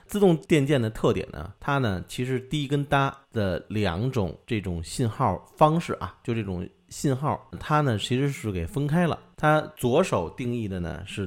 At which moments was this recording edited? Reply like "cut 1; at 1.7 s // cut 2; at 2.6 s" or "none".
cut 1; at 3.2 s // cut 2; at 4.4 s // cut 3; at 7.5 s